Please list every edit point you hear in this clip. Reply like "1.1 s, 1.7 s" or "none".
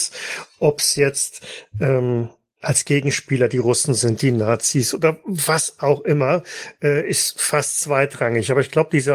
none